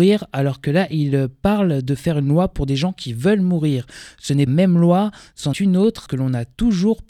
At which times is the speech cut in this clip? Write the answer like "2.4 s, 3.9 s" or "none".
4.5 s, 5.5 s, 6.1 s

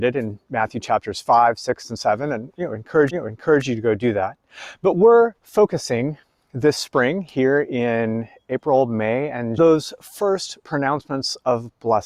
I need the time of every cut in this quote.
3.1 s, 5.4 s, 9.6 s

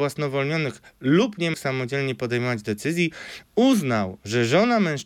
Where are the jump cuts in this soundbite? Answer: 1.5 s

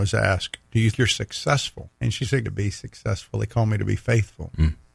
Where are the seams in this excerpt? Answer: 0.9 s, 1.9 s, 2.4 s

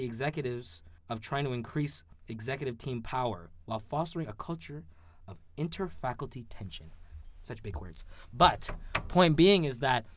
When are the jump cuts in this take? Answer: 1.0 s

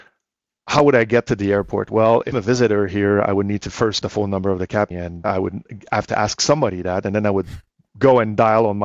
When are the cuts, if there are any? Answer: 2.3 s, 4.0 s, 4.9 s, 5.2 s

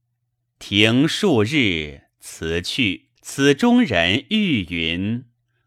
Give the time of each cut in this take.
3.2 s

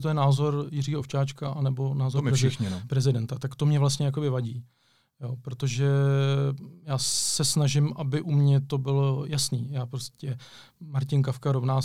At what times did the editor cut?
none

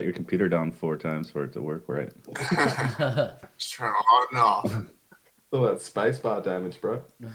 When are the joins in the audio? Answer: none

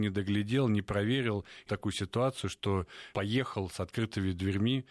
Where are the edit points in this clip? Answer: 1.7 s, 3.1 s

